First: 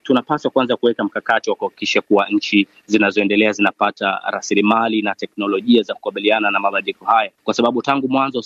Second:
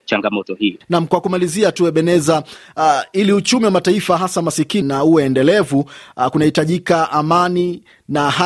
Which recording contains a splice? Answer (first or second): second